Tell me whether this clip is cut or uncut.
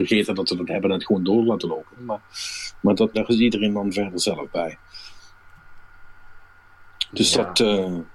cut